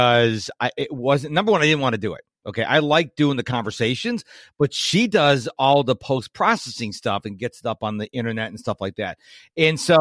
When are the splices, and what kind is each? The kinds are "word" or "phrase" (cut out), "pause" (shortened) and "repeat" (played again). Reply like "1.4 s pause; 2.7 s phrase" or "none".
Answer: none